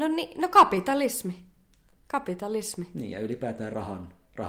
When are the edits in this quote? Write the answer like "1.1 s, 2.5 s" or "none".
none